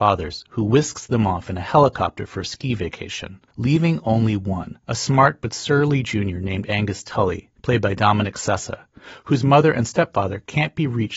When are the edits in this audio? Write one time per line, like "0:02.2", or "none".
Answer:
0:03.5
0:04.8
0:07.6

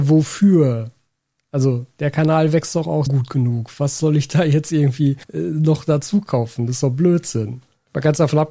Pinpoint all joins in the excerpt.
0:03.1
0:05.2

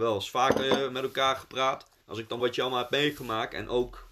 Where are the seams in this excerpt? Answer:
0:02.0
0:02.4

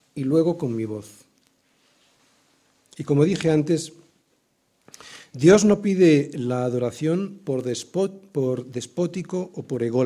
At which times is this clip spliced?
none

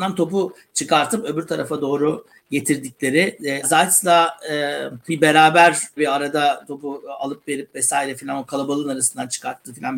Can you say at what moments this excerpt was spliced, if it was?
0:03.6
0:05.1
0:06.0

